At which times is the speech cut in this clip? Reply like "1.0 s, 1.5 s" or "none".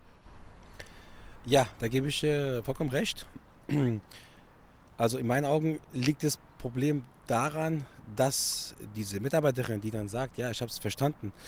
none